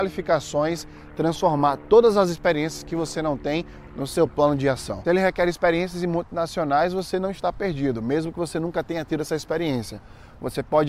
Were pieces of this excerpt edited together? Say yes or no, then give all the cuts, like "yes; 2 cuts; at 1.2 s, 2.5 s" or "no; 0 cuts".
no; 0 cuts